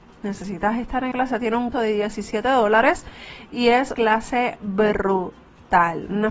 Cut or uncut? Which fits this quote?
cut